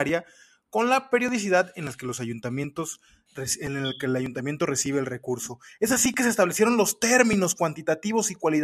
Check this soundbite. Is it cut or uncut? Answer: uncut